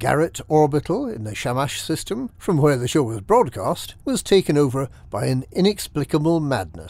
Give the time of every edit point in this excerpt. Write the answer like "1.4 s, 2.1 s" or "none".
2.3 s, 4.0 s